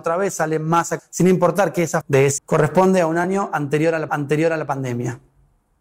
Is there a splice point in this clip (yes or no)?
yes